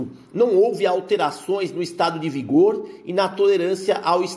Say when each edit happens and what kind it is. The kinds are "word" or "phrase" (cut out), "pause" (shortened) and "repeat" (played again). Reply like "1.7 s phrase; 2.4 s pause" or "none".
none